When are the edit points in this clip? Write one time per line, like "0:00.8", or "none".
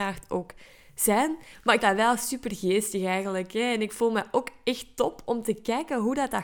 0:01.8